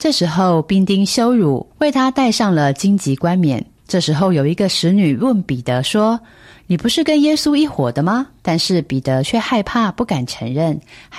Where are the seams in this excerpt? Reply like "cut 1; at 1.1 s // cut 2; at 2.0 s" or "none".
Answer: cut 1; at 1.7 s // cut 2; at 3.8 s // cut 3; at 8.4 s